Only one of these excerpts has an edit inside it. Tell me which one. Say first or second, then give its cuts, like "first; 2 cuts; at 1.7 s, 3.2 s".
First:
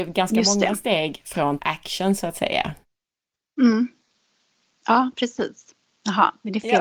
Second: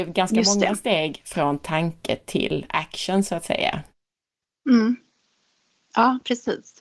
first; 1 cut; at 1.6 s